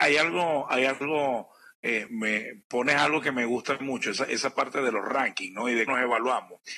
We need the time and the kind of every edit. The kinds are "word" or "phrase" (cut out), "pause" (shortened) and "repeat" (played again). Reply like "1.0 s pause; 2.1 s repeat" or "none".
2.1 s word; 5.9 s word

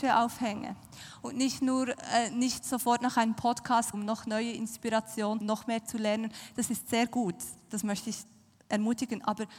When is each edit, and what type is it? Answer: 3.9 s word; 5.4 s phrase

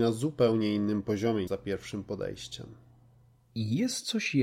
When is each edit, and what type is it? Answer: 1.5 s word

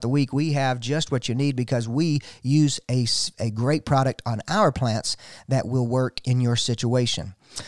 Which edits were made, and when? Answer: none

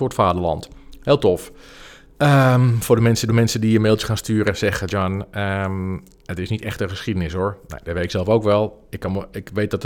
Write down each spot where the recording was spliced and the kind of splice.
3.3 s repeat

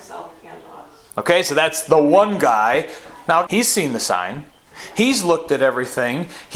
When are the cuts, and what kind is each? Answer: 3.5 s word

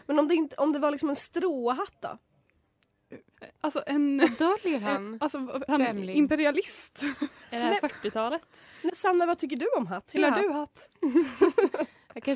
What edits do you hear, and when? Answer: 5.7 s word; 8.9 s word; 10.2 s word

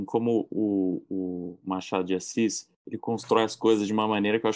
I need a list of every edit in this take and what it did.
2.7 s pause

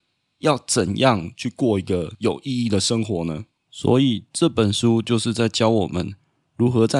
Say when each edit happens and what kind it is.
3.6 s pause

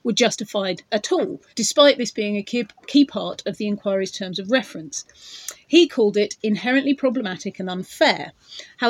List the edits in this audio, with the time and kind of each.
1.5 s pause

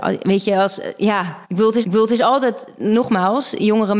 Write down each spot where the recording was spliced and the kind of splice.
1.4 s pause; 1.8 s repeat

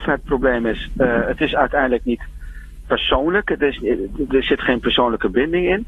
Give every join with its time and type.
2.8 s word

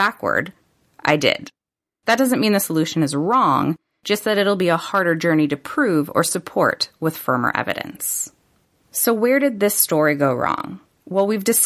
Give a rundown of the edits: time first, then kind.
none

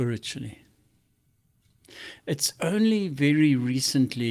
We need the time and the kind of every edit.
none

